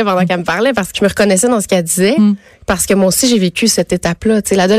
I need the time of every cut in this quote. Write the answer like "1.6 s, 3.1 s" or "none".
0.9 s